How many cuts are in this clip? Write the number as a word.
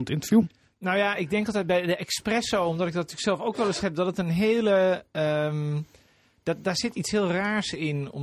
one